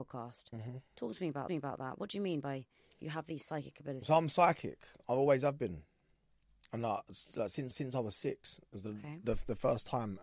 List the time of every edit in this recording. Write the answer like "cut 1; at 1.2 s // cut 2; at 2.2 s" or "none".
cut 1; at 1.5 s // cut 2; at 7.7 s